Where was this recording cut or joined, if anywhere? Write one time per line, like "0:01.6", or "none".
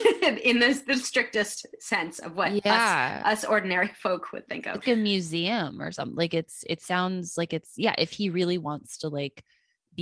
0:04.8